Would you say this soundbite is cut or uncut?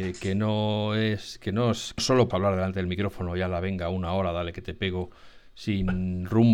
cut